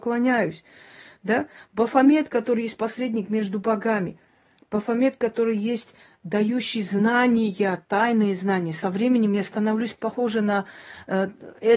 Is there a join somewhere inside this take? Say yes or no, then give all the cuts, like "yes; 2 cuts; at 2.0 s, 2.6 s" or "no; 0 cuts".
no; 0 cuts